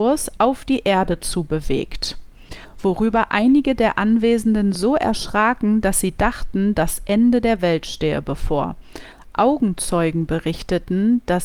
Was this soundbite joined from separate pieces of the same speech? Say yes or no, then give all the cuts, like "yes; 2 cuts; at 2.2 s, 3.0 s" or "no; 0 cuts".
no; 0 cuts